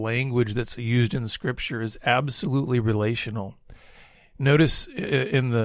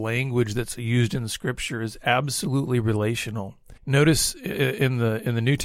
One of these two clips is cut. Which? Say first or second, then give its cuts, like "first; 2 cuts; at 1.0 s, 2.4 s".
second; 1 cut; at 3.8 s